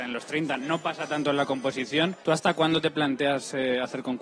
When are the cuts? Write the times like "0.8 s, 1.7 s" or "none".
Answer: 2.2 s